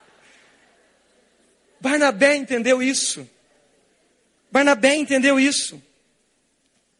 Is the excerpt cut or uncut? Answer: uncut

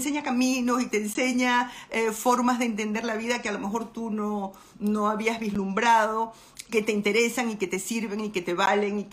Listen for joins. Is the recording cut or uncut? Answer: cut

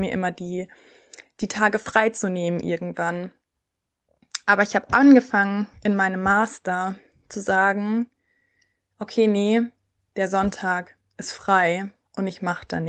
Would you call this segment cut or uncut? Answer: uncut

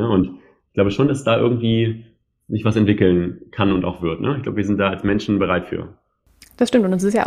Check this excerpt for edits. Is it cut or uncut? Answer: uncut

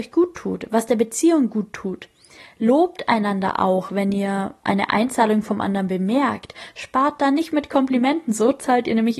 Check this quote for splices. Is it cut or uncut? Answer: uncut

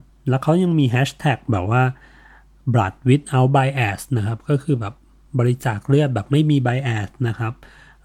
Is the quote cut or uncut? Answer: uncut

